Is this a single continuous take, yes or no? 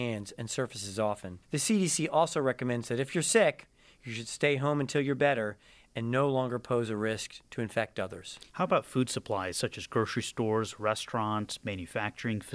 no